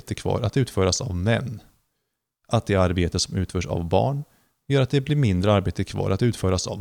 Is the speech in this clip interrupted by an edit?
no; 0 cuts

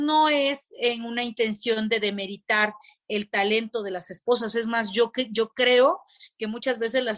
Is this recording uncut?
yes; 0 cuts

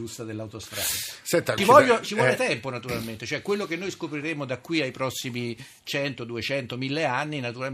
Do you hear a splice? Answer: yes; 1 cut; at 1.6 s

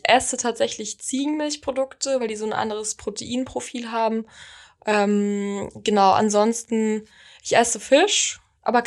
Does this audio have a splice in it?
no; 0 cuts

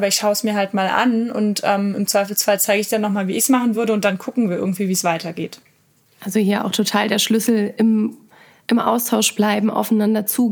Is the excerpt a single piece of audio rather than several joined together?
yes; 0 cuts

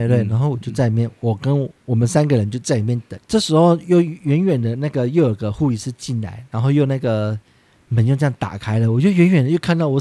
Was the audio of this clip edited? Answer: no; 0 cuts

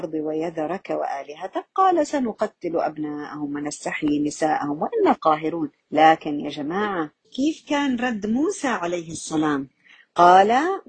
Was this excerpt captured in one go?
no; 3 cuts; at 5.2 s, 5.8 s, 7.2 s

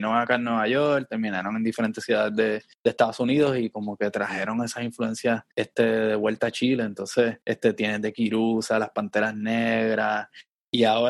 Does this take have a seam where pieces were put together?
yes; 3 cuts; at 2.7 s, 5.5 s, 7.4 s

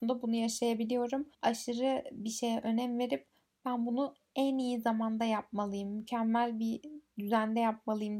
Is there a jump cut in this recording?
yes; 1 cut; at 1.3 s

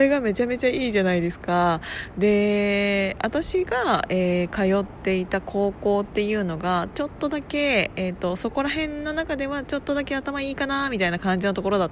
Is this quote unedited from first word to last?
yes; 0 cuts

